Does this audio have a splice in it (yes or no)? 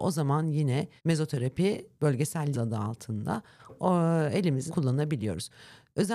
yes